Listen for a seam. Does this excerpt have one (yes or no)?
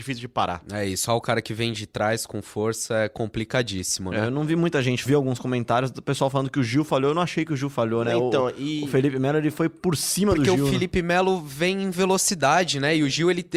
yes